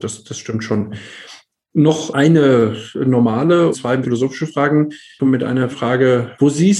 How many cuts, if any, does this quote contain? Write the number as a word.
four